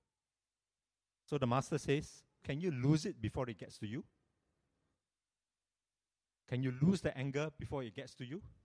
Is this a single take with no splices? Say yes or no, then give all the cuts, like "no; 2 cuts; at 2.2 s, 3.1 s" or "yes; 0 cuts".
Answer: no; 1 cut; at 2.4 s